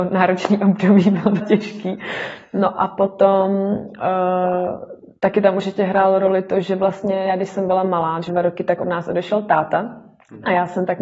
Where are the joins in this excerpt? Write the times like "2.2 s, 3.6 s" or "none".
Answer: 1.4 s, 8.3 s